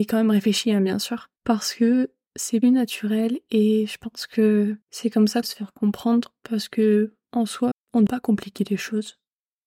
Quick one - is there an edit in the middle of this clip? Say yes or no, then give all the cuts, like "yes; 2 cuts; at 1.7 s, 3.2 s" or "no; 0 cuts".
yes; 7 cuts; at 1.4 s, 2.6 s, 4.8 s, 5.4 s, 7.2 s, 7.7 s, 8.1 s